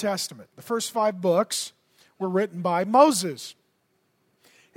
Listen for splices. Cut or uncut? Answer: uncut